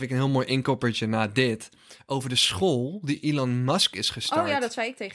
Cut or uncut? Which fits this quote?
uncut